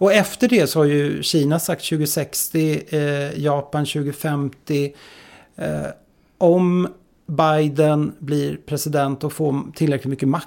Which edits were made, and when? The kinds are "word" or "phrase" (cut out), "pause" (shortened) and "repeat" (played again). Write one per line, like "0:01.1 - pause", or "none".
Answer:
none